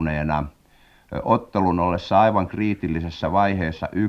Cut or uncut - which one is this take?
uncut